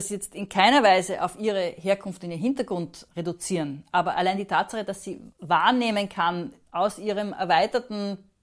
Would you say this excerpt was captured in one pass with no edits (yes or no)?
no